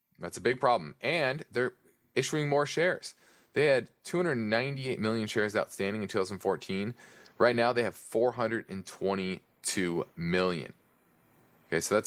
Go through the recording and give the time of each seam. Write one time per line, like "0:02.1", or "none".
none